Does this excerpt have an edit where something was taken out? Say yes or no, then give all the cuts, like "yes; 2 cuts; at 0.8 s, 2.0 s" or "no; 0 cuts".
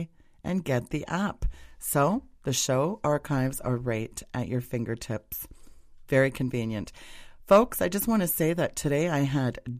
no; 0 cuts